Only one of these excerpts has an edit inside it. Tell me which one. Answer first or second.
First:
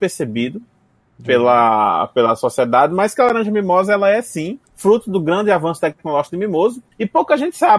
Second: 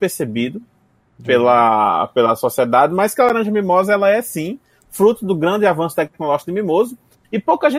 first